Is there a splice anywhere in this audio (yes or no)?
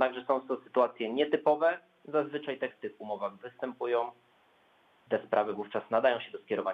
yes